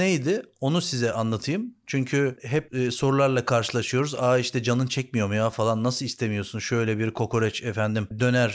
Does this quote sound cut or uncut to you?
uncut